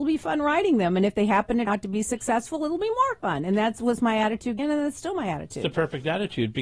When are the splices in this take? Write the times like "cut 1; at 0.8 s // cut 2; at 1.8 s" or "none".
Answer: cut 1; at 1.7 s // cut 2; at 4.6 s